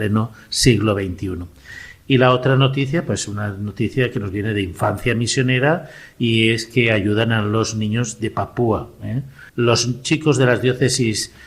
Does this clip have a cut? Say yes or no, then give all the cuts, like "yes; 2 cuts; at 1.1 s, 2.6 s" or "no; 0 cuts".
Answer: yes; 1 cut; at 9.5 s